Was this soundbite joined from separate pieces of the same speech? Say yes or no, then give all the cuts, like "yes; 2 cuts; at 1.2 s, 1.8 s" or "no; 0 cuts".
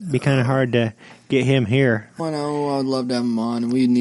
yes; 1 cut; at 2.2 s